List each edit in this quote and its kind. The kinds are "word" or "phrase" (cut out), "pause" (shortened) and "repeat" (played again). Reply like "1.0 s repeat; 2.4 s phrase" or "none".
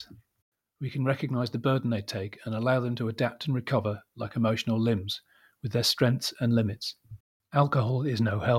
none